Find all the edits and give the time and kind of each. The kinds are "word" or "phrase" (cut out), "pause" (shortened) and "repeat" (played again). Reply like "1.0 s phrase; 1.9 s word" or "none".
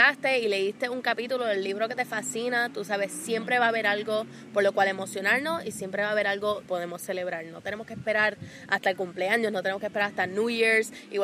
6.7 s word